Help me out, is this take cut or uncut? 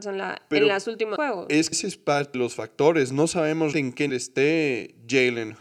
cut